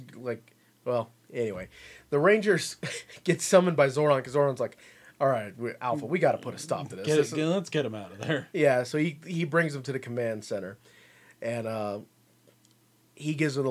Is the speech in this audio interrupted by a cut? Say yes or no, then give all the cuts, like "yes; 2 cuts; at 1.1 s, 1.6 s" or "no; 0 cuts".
no; 0 cuts